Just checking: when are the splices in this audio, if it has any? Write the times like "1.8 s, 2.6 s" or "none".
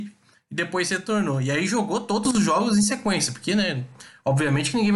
none